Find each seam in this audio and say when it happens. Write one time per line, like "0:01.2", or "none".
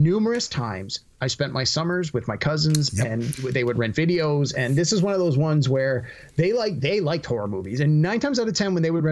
none